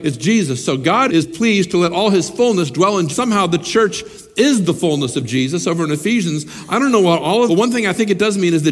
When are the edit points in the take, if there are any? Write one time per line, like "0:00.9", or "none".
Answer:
0:01.1
0:03.1
0:07.5